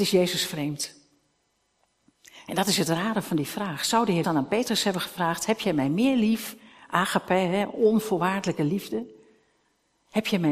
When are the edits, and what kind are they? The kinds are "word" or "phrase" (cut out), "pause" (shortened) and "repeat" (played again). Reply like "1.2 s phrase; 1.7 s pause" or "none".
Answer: 4.2 s word

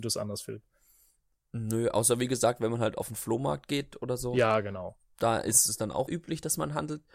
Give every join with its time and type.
6.1 s word

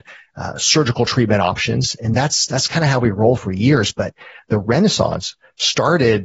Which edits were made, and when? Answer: none

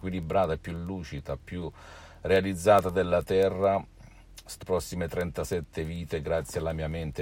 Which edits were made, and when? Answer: 4.6 s phrase

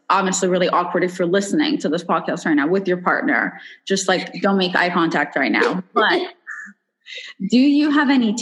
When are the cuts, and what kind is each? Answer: none

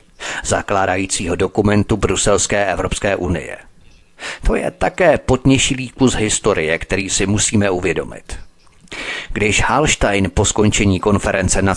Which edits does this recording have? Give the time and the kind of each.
none

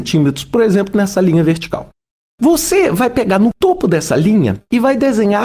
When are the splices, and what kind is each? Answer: none

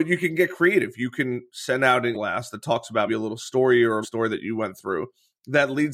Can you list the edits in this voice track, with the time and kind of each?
2.1 s word; 3.1 s word; 4.0 s word

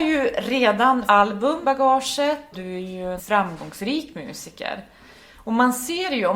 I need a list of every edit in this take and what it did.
1.1 s word; 1.6 s word; 2.5 s word; 3.2 s word

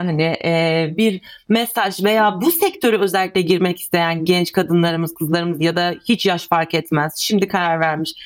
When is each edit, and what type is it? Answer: none

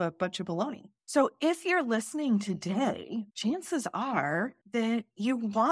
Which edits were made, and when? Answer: 1.0 s pause; 3.3 s pause; 4.6 s pause

